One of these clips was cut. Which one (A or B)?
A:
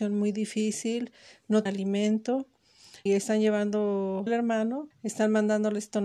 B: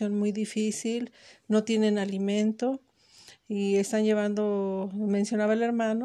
A